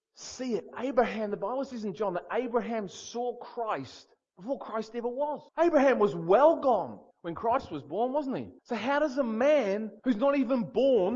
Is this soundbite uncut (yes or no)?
no